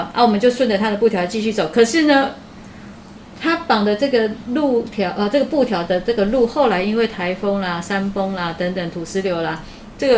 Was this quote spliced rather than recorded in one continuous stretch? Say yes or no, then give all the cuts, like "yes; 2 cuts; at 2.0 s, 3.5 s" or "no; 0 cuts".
no; 0 cuts